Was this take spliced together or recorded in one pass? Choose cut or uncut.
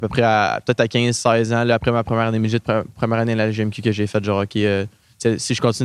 uncut